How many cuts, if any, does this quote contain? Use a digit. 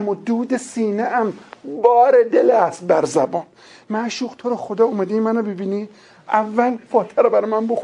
0